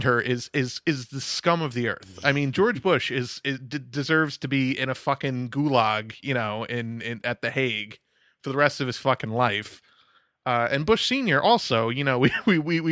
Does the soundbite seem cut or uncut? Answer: uncut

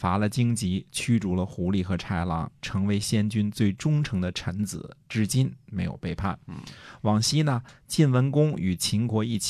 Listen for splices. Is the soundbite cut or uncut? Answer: uncut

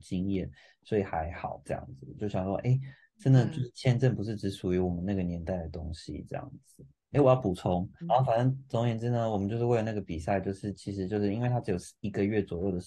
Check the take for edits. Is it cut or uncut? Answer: cut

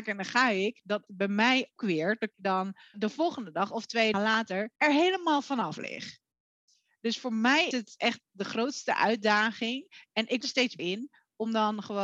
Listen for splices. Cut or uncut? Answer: cut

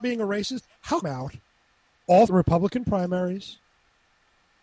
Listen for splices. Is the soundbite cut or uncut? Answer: cut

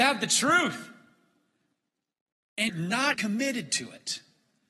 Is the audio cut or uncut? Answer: cut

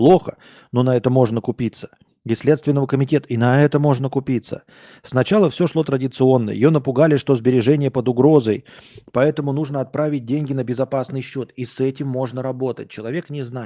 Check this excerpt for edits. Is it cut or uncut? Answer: uncut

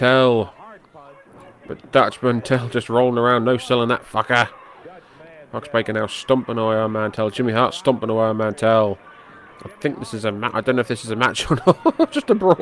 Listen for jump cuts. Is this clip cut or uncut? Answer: uncut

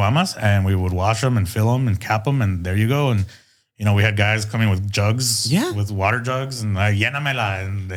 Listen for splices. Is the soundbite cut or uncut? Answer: uncut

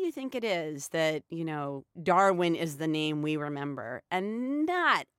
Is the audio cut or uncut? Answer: cut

